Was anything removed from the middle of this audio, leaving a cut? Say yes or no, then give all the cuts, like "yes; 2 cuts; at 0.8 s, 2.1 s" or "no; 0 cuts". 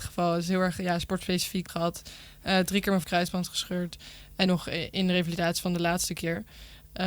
yes; 3 cuts; at 1.7 s, 3.0 s, 4.5 s